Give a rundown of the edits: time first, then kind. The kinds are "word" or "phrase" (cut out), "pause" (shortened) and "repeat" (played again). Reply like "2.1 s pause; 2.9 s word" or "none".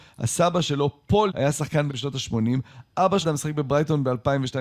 1.3 s word; 1.9 s word; 3.2 s word